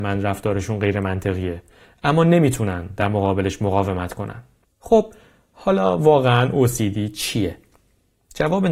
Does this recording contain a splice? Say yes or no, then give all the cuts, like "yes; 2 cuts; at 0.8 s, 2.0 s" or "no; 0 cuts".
no; 0 cuts